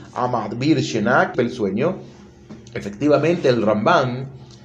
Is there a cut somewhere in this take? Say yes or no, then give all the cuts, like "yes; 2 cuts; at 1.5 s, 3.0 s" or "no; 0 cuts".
yes; 1 cut; at 1.3 s